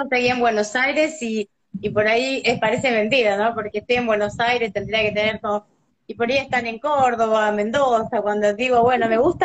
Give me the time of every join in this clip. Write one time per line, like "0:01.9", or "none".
none